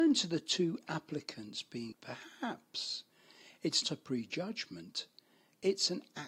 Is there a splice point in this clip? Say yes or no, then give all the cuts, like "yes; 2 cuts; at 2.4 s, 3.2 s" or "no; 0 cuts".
yes; 2 cuts; at 1.9 s, 3.8 s